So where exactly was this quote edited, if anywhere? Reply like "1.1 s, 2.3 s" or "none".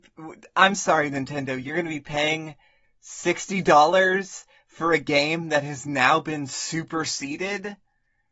none